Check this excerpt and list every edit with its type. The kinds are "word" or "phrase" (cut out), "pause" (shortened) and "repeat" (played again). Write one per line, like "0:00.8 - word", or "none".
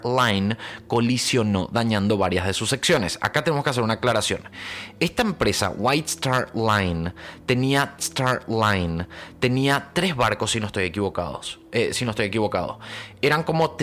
0:08.0 - repeat